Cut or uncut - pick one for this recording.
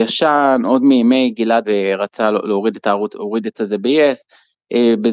cut